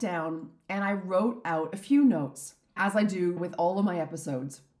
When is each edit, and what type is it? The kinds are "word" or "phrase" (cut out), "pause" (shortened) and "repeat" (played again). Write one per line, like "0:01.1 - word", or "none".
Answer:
none